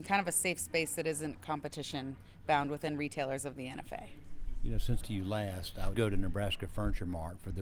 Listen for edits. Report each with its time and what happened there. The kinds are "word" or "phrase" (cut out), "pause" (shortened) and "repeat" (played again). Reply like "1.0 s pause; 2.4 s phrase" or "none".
5.0 s phrase; 5.9 s word